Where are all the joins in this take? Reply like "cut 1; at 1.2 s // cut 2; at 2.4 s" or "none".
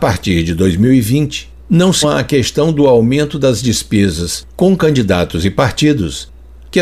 cut 1; at 1.6 s // cut 2; at 2.0 s